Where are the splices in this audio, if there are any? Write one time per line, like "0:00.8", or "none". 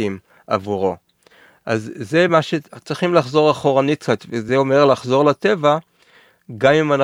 none